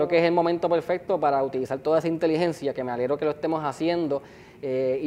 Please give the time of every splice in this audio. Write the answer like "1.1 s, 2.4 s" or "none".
none